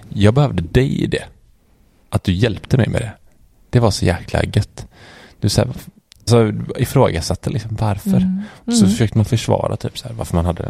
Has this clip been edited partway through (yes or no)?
no